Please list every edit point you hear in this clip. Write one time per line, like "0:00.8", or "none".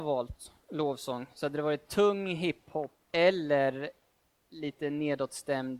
0:03.0